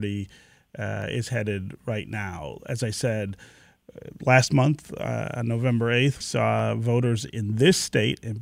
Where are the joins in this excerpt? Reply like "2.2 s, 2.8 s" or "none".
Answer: 6.2 s